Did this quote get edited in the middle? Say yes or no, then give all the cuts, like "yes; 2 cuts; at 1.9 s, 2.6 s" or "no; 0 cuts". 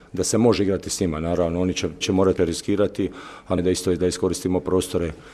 yes; 3 cuts; at 2.0 s, 2.4 s, 3.6 s